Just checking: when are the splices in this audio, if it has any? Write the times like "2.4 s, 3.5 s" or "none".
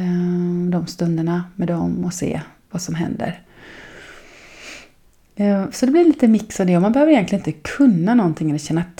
none